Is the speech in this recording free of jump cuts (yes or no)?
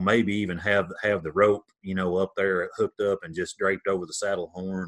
yes